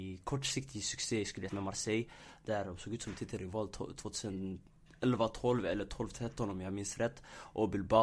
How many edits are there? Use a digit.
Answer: 1